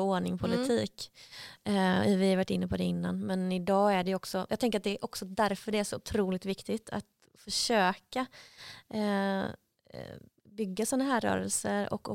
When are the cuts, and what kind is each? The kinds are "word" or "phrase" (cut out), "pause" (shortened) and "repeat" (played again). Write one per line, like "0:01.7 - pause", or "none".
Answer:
none